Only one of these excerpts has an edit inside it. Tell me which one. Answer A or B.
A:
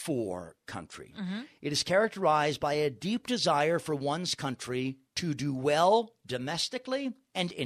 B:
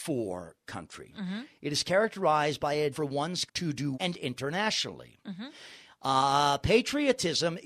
B